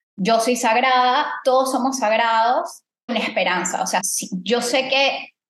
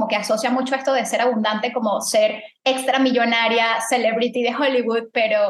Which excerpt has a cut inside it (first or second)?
first